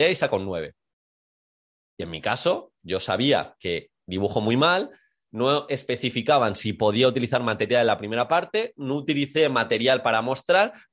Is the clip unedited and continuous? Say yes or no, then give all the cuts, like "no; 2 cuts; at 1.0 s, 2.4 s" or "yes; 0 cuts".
yes; 0 cuts